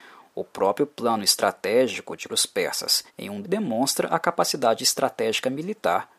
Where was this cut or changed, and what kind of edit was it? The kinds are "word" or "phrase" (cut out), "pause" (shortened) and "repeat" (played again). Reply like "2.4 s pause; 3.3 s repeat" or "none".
2.3 s word; 3.1 s pause; 3.4 s word